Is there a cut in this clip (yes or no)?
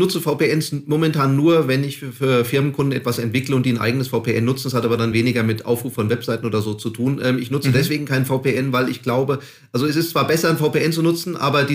no